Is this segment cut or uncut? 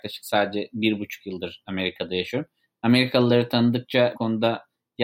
cut